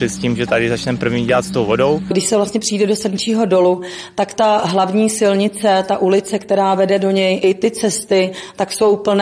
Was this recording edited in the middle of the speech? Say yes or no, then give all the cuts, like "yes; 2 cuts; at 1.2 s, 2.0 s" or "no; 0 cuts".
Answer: yes; 1 cut; at 7.4 s